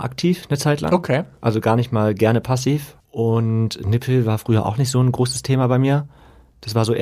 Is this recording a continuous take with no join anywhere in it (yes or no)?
no